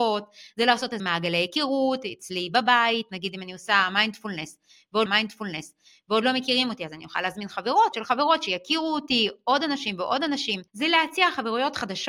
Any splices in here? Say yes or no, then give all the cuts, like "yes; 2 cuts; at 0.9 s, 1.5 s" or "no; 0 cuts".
yes; 4 cuts; at 1.0 s, 5.1 s, 7.9 s, 10.7 s